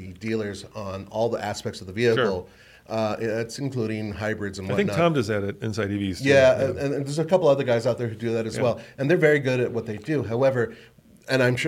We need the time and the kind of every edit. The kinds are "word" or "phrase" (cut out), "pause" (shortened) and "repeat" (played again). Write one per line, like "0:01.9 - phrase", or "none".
none